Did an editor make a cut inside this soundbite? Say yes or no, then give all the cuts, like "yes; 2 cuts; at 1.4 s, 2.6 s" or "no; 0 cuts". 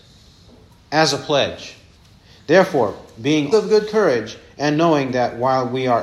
yes; 2 cuts; at 1.9 s, 3.5 s